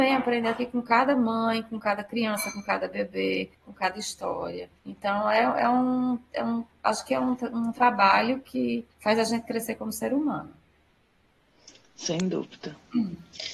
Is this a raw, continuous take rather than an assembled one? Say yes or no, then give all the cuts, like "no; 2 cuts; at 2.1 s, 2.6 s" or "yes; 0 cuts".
no; 3 cuts; at 3.5 s, 4.8 s, 8.9 s